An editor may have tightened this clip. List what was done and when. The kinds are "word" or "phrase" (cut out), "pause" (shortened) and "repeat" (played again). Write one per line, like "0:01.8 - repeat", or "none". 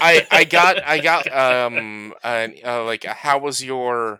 0:01.2 - word